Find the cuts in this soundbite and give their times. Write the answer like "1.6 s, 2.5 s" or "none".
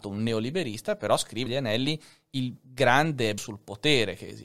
1.5 s, 2.6 s, 3.4 s